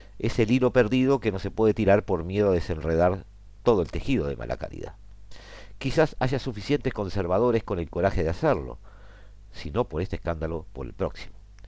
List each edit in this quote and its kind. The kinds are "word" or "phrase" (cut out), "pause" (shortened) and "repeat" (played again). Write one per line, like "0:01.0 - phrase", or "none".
none